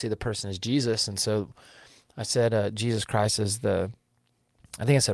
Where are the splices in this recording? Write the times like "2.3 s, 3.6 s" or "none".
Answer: none